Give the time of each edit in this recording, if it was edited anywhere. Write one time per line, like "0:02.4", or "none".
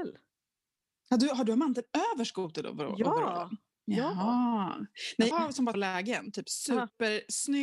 0:05.3
0:05.7